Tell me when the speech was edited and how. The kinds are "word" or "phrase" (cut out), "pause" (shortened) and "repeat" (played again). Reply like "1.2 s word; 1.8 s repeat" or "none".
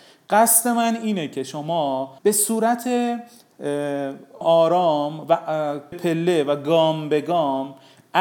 2.2 s pause; 4.4 s word; 5.9 s word

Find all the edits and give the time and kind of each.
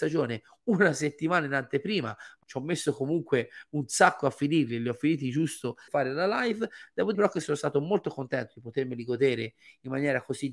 2.4 s phrase; 5.9 s phrase; 7.1 s word

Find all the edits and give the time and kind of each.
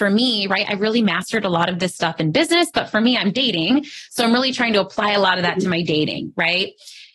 none

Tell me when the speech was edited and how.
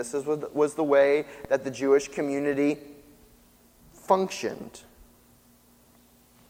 none

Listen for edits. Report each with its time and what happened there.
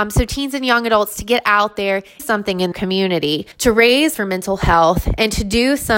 2.2 s phrase; 2.7 s word; 3.5 s pause; 4.1 s word

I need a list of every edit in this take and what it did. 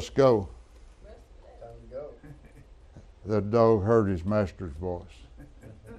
none

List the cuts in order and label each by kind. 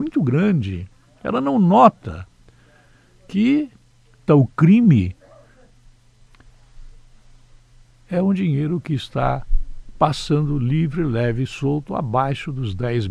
4.3 s phrase

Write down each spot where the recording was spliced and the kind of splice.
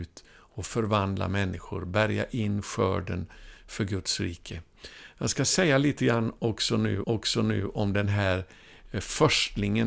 7.0 s repeat

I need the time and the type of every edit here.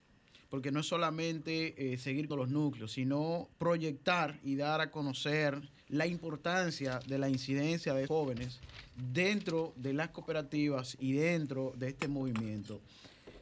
2.3 s word; 3.5 s word; 8.1 s word

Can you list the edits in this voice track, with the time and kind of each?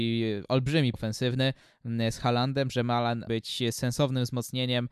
0.9 s word; 3.3 s phrase

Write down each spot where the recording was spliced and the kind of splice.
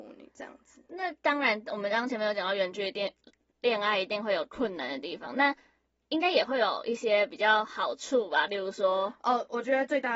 none

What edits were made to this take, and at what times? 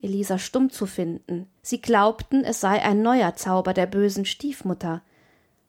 1.6 s pause

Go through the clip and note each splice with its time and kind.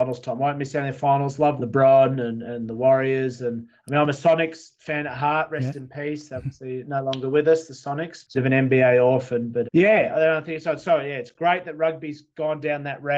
1.6 s word; 6.8 s word; 8.3 s phrase; 9.6 s word

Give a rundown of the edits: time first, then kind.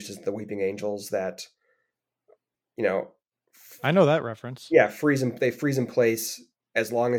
none

